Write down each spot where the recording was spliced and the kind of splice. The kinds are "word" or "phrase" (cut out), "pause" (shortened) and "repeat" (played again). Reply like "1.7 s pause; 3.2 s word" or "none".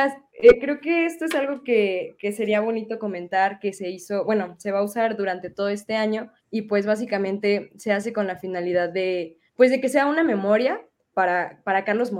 6.4 s pause; 9.5 s pause